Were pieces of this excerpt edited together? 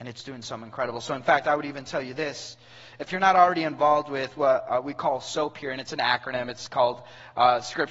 no; 0 cuts

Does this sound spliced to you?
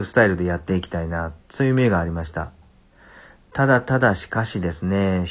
no; 0 cuts

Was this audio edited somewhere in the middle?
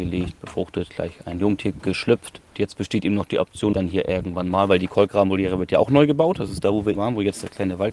yes; 2 cuts; at 3.7 s, 6.9 s

